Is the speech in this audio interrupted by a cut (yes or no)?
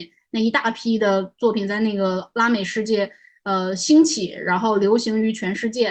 no